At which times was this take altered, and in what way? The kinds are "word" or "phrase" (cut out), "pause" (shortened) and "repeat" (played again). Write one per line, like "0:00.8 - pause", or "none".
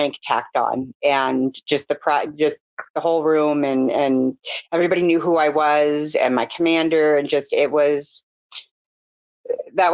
none

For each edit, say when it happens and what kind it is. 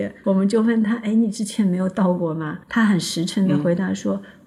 0:02.6 - pause

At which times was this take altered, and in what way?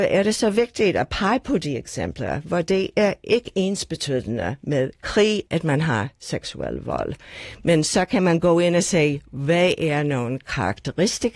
0:05.5 - pause

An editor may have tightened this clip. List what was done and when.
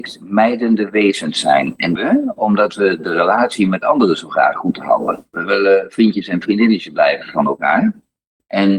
0:02.0 - phrase

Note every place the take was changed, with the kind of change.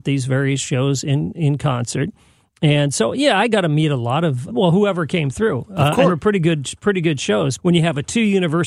0:04.5 - word
0:06.1 - phrase
0:07.6 - word

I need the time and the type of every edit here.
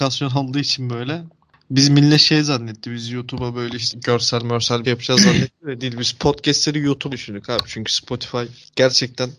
0:03.9 - word
0:04.8 - word
0:07.1 - word

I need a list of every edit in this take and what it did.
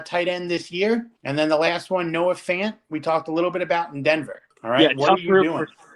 0:01.2 - pause
0:04.5 - pause

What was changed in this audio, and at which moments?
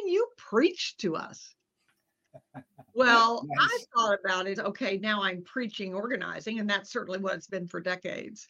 0:02.9 - pause
0:04.6 - word

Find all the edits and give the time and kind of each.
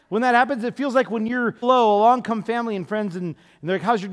0:01.6 - word

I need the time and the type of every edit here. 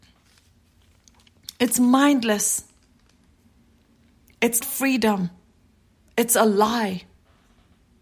0:04.6 - word

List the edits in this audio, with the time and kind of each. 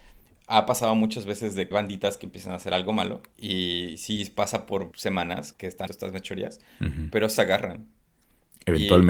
0:01.7 - word
0:03.3 - pause
0:04.9 - word
0:05.5 - word
0:05.9 - word
0:07.4 - word

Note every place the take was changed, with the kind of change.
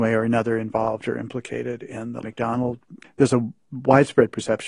0:02.2 - word
0:03.0 - word

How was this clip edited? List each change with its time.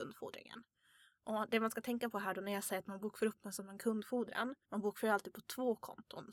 0:04.6 - pause

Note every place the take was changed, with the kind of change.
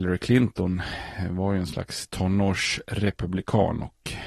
none

